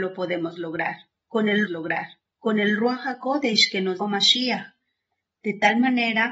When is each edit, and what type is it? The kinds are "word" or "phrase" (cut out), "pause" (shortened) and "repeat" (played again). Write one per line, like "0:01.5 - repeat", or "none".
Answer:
0:01.7 - repeat
0:04.0 - word